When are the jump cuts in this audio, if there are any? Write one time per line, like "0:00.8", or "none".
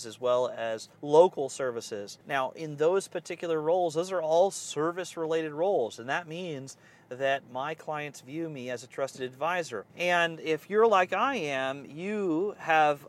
0:00.9
0:02.2
0:09.9